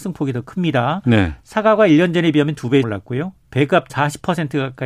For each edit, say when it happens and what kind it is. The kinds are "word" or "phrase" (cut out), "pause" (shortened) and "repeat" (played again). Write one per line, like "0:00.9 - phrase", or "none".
0:02.8 - word
0:03.9 - word